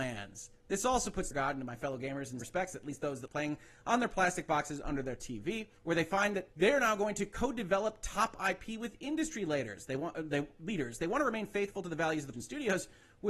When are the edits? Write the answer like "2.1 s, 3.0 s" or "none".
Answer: 1.3 s, 2.4 s, 3.3 s, 5.8 s, 6.5 s, 12.3 s